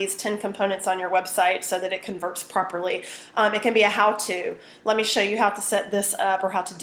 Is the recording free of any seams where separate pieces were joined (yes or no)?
yes